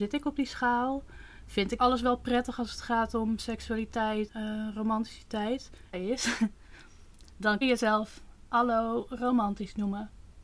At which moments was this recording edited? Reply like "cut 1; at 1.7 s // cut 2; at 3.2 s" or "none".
cut 1; at 1.8 s // cut 2; at 4.3 s // cut 3; at 5.9 s // cut 4; at 7.6 s